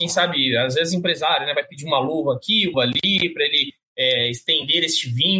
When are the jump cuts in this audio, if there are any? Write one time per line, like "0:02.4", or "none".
0:02.7